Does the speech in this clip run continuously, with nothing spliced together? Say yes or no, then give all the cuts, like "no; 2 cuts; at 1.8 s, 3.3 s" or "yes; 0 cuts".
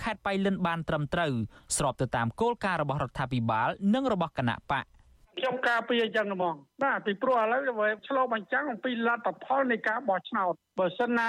yes; 0 cuts